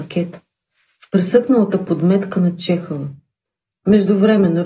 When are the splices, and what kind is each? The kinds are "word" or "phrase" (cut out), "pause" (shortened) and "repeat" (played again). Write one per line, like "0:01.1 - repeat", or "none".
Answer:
none